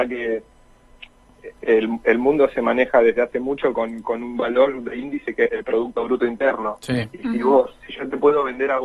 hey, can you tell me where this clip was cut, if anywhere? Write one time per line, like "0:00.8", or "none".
0:05.5